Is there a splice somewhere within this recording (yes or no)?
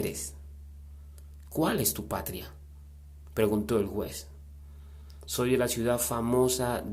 no